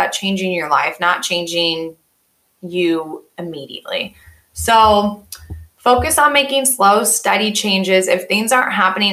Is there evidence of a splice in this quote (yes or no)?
no